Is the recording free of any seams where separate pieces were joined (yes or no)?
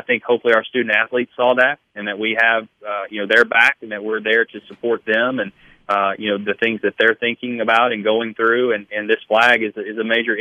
yes